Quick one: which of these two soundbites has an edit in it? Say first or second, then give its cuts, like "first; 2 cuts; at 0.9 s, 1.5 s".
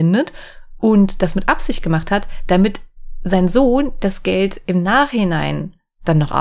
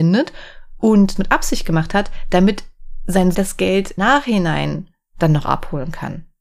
second; 3 cuts; at 1.2 s, 3.3 s, 4.0 s